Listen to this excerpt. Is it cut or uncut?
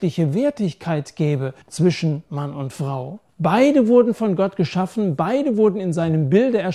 cut